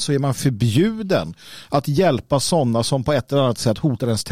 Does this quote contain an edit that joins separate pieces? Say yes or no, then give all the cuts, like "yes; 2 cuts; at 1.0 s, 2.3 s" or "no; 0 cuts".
no; 0 cuts